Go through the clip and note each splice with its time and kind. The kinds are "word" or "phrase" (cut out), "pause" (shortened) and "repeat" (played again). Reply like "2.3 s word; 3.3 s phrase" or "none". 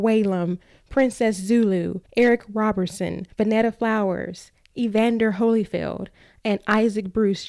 2.1 s pause; 3.3 s pause